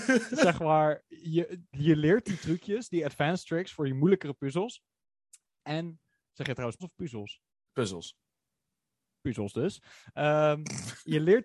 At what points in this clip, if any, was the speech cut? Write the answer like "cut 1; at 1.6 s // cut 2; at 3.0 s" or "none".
cut 1; at 1.7 s // cut 2; at 6.8 s // cut 3; at 7.5 s